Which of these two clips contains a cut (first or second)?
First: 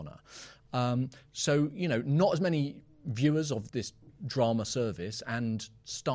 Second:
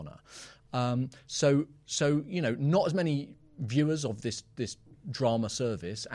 first